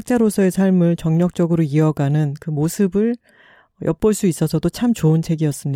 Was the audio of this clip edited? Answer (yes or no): no